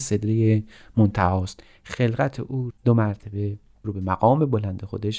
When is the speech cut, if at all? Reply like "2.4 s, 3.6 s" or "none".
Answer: 2.7 s, 3.8 s